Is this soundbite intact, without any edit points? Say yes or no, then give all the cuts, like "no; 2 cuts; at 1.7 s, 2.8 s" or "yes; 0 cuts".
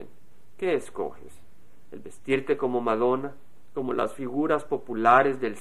yes; 0 cuts